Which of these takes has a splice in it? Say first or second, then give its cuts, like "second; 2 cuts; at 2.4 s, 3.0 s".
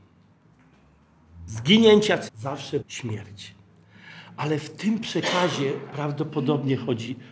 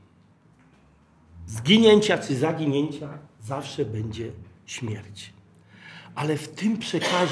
first; 2 cuts; at 2.3 s, 2.8 s